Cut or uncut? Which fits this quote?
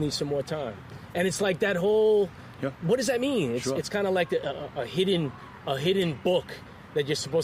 uncut